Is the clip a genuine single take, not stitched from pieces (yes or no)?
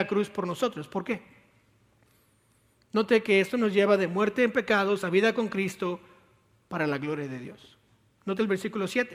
yes